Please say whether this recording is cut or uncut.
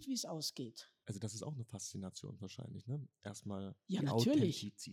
uncut